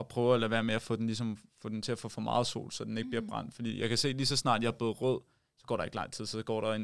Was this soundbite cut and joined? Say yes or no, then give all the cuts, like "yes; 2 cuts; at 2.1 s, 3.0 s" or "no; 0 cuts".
no; 0 cuts